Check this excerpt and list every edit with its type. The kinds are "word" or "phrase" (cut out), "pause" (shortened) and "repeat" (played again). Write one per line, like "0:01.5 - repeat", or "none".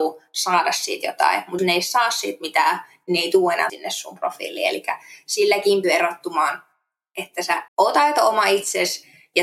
0:01.6 - word
0:03.7 - word
0:05.8 - word
0:07.7 - pause